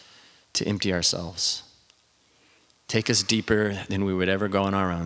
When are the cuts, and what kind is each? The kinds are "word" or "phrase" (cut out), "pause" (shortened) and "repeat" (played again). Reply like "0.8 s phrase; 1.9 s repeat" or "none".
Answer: none